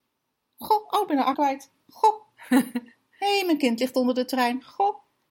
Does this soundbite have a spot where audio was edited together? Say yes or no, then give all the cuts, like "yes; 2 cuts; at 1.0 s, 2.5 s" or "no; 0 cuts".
yes; 1 cut; at 1.3 s